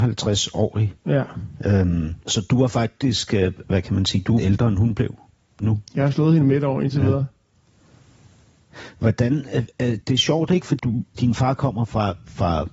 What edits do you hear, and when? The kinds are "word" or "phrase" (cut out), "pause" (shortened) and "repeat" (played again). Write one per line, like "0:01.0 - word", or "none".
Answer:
0:02.2 - pause
0:03.6 - word
0:04.4 - phrase
0:05.9 - pause
0:10.0 - word
0:10.8 - word
0:11.2 - word